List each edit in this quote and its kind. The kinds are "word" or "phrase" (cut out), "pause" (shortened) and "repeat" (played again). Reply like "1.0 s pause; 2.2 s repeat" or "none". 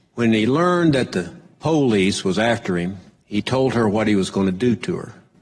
none